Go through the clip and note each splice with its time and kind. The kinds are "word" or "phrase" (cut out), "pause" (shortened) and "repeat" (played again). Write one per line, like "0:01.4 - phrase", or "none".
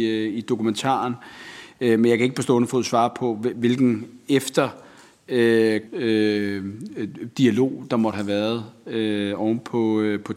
0:05.9 - word